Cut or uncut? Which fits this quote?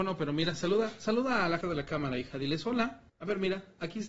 cut